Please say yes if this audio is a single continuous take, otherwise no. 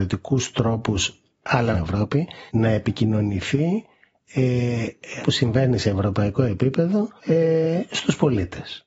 no